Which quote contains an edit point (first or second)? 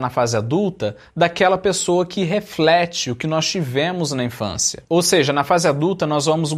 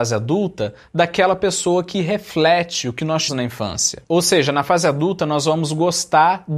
second